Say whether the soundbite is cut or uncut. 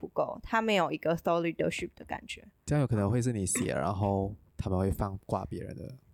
uncut